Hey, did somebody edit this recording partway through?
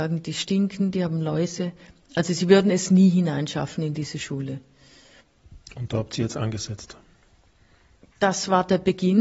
no; 0 cuts

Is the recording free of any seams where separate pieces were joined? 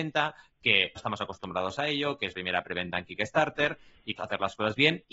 no; 3 cuts; at 1.0 s, 2.3 s, 4.2 s

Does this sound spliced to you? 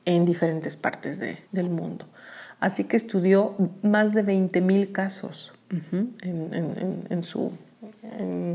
yes; 2 cuts; at 1.4 s, 5.6 s

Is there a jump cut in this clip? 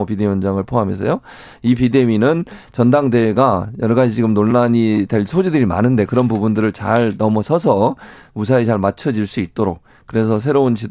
no; 0 cuts

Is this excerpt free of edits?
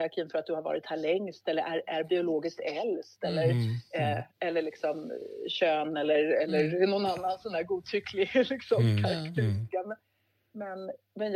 yes; 0 cuts

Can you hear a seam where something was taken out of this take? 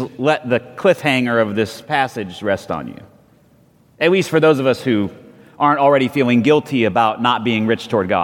no; 0 cuts

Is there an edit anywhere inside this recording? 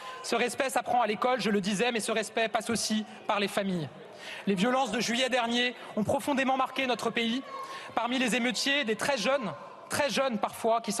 no; 0 cuts

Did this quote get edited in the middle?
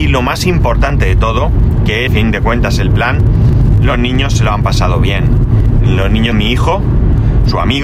yes; 2 cuts; at 2.1 s, 6.3 s

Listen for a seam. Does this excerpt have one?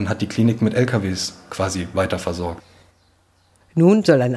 no; 0 cuts

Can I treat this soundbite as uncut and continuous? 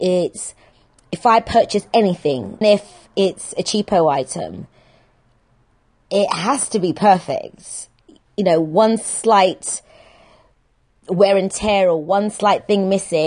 no; 1 cut; at 2.6 s

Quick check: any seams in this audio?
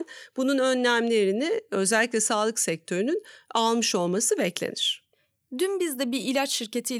no; 0 cuts

